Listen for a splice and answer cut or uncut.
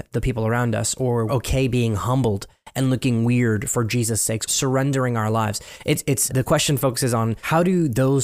cut